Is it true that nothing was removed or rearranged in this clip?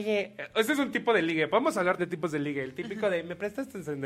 no; 1 cut; at 2.0 s

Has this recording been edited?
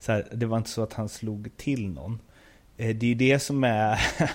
no; 0 cuts

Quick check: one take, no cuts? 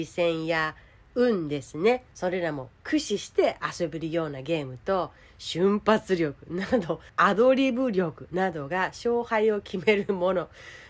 yes; 0 cuts

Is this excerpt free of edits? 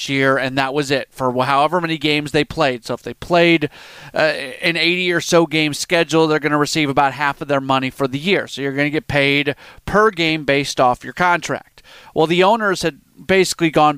yes; 0 cuts

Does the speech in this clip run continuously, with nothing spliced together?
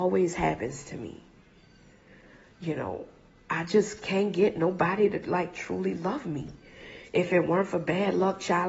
yes; 0 cuts

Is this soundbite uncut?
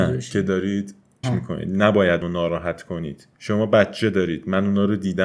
no; 2 cuts; at 1.2 s, 2.2 s

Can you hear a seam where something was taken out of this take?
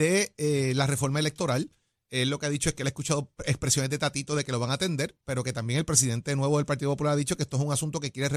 no; 0 cuts

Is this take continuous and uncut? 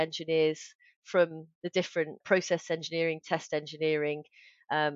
no; 2 cuts; at 2.2 s, 3.2 s

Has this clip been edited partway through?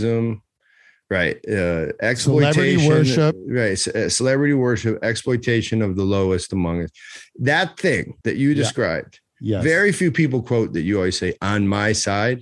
yes; 1 cut; at 8.2 s

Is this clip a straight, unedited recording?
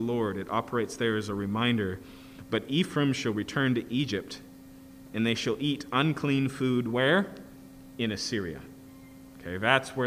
yes; 0 cuts

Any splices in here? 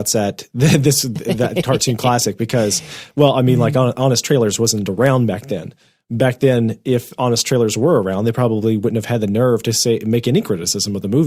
no; 0 cuts

